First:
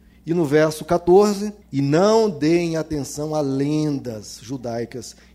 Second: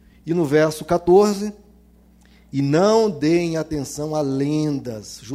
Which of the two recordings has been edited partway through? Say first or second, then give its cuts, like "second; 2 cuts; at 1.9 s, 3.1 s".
first; 1 cut; at 1.6 s